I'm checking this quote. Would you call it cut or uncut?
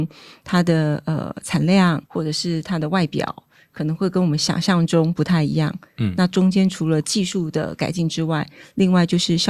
cut